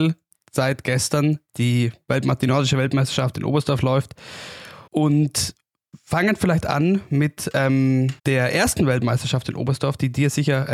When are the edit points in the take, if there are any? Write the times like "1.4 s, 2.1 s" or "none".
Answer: 4.9 s, 8.2 s